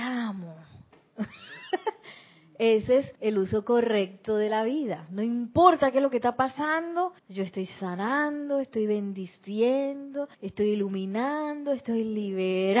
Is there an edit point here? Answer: yes; 3 cuts; at 3.2 s, 7.2 s, 10.3 s

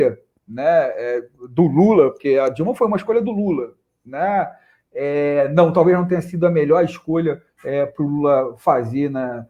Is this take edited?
yes; 1 cut; at 7.5 s

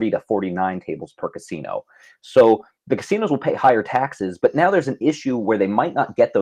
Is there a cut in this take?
no; 0 cuts

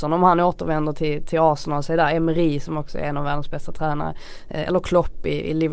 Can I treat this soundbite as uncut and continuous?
yes; 0 cuts

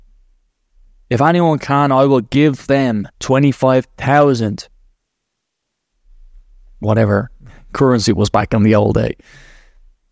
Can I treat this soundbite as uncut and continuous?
no; 1 cut; at 3.1 s

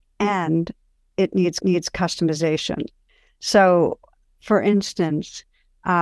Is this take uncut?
no; 1 cut; at 1.6 s

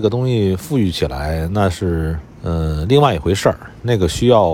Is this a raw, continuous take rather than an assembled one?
no; 1 cut; at 2.3 s

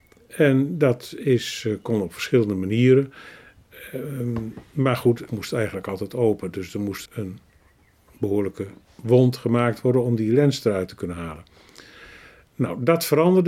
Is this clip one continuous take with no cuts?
no; 3 cuts; at 5.3 s, 7.1 s, 8.8 s

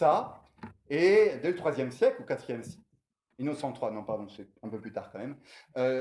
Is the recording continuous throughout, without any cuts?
yes; 0 cuts

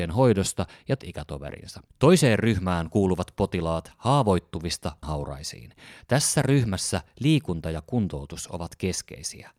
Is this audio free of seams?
no; 3 cuts; at 1.0 s, 1.9 s, 5.0 s

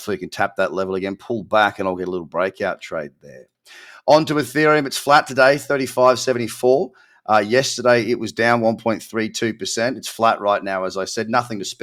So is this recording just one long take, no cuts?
yes; 0 cuts

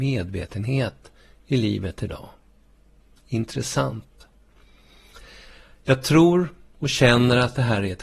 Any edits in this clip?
no; 0 cuts

